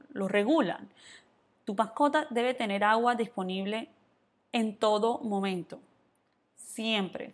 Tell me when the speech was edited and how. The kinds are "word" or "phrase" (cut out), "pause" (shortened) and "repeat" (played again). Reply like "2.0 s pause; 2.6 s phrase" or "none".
none